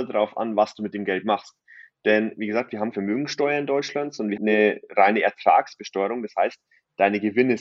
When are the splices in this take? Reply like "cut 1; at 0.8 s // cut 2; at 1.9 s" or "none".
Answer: cut 1; at 2.9 s // cut 2; at 4.4 s